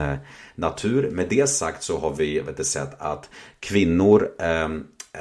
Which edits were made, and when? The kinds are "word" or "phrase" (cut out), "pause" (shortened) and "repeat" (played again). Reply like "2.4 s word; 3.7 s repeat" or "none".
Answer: none